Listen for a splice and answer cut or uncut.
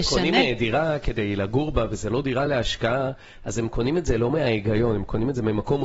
uncut